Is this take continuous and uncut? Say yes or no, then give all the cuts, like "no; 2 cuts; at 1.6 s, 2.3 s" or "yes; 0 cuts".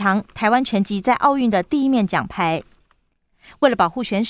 yes; 0 cuts